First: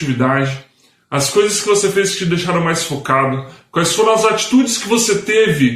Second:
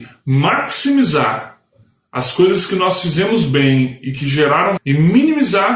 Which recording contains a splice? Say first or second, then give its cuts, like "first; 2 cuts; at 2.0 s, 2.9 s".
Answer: second; 1 cut; at 4.8 s